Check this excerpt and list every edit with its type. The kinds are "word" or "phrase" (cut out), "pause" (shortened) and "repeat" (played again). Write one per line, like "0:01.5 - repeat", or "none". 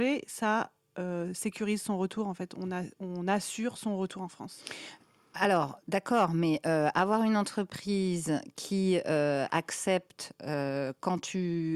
none